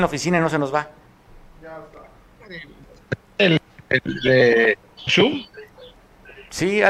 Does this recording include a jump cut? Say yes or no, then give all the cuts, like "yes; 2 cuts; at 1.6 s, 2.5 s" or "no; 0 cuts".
yes; 1 cut; at 5.1 s